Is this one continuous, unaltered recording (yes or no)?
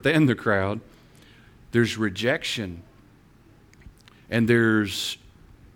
yes